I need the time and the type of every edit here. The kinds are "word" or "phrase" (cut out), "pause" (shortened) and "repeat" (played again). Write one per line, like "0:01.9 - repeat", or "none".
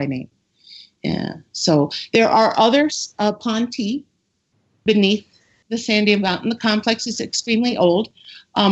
none

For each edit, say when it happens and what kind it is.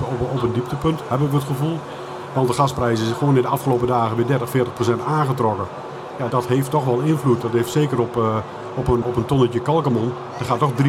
0:06.3 - word
0:09.0 - word

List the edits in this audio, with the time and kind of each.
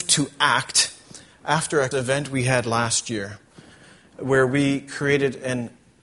0:01.9 - word

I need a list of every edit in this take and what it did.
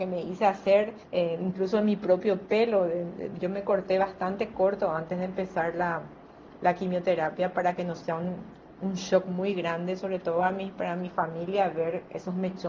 0:01.0 - pause

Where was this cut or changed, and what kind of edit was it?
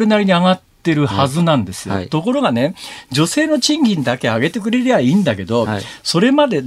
none

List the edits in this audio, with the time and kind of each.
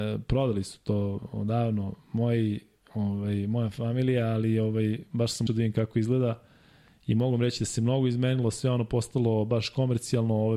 0:05.5 - word

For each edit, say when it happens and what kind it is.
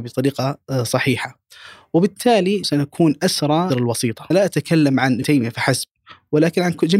0:02.6 - word
0:03.7 - word
0:04.3 - word
0:05.2 - word

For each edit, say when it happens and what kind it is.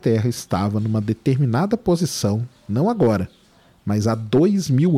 none

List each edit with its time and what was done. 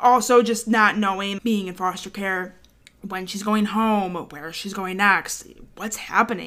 0:01.4 - word

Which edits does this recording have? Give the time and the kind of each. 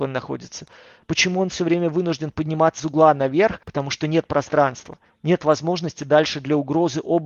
0:02.8 - word
0:03.6 - pause

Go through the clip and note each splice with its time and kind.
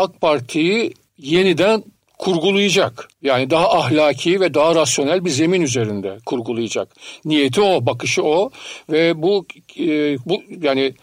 0:01.1 - pause
0:03.1 - pause

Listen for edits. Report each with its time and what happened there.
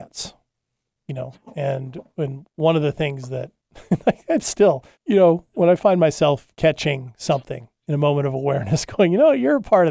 0:04.9 - pause
0:06.5 - pause
0:07.8 - pause

